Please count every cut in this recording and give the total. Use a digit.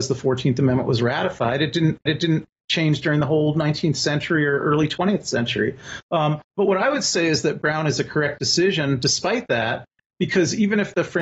1